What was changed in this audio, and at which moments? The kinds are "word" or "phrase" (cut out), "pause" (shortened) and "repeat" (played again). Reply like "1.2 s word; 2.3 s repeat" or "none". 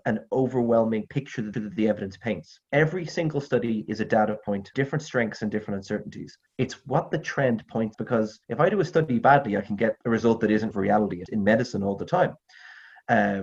1.5 s repeat; 2.6 s pause; 4.7 s word; 6.5 s pause; 7.9 s word; 8.4 s pause; 10.0 s pause; 10.7 s word; 11.3 s word